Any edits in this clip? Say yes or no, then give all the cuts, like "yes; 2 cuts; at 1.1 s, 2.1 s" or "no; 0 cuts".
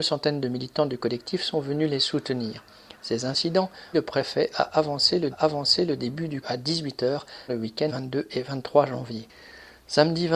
yes; 5 cuts; at 3.9 s, 5.3 s, 6.4 s, 7.5 s, 7.9 s